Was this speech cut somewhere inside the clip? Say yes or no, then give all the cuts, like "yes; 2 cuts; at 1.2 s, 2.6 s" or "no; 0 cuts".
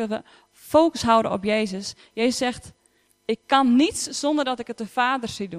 no; 0 cuts